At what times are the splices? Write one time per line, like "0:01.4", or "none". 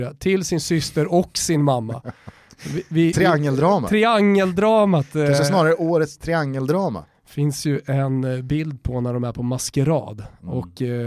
none

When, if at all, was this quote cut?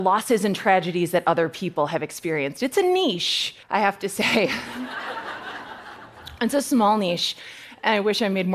0:03.6

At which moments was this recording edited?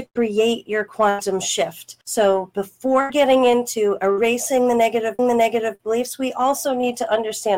0:02.0
0:05.2

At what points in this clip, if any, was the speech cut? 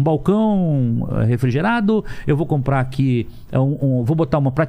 none

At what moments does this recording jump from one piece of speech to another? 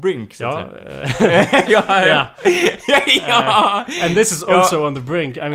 0:01.7

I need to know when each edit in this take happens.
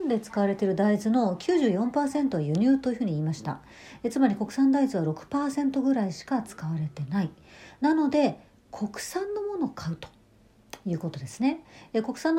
none

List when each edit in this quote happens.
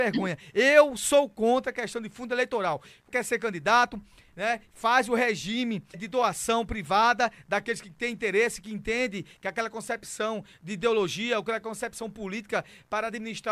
0:03.1
0:05.9

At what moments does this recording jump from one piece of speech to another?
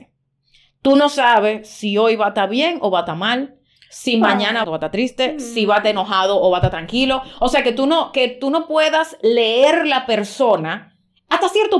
0:04.6

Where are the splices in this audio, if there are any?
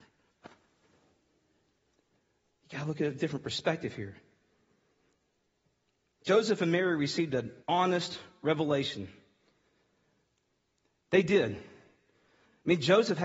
0:07.6

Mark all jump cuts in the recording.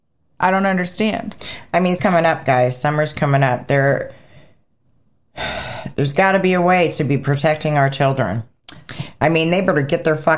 0:02.0

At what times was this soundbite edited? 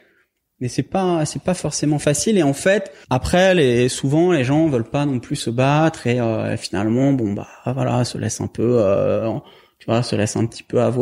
none

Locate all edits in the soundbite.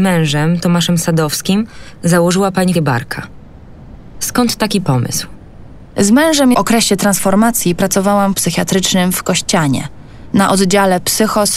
0:02.7
0:06.5
0:08.3

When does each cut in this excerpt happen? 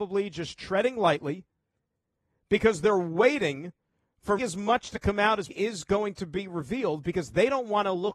0:04.4
0:05.5

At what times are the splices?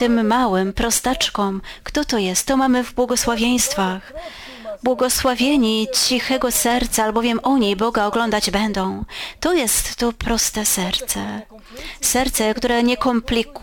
none

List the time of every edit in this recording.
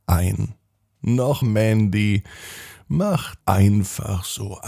0:01.4
0:03.4

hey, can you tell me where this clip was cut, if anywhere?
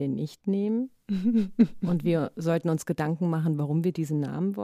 none

